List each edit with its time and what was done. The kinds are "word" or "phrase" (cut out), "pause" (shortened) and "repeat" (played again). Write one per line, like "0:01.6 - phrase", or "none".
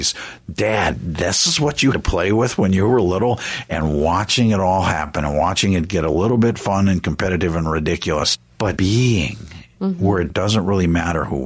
0:01.9 - word
0:08.8 - word